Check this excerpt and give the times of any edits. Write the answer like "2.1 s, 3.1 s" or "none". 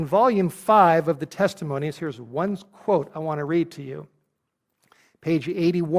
none